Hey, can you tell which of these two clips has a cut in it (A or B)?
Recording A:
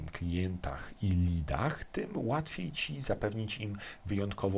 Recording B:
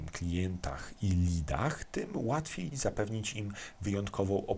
B